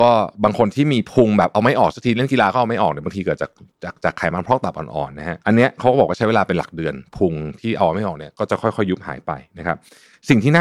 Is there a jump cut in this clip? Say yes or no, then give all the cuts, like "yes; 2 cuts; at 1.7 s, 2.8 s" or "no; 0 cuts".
yes; 1 cut; at 5.4 s